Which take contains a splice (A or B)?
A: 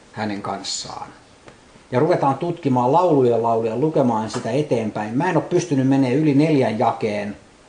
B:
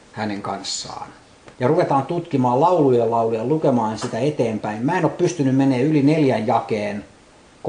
B